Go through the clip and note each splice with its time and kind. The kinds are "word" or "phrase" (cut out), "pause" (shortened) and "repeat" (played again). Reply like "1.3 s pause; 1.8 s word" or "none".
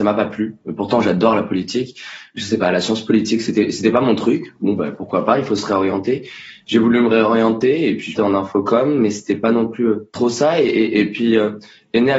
8.1 s phrase; 10.1 s pause